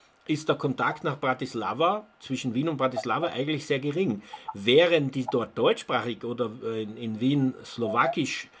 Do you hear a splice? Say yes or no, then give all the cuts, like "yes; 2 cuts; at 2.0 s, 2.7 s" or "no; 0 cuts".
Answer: no; 0 cuts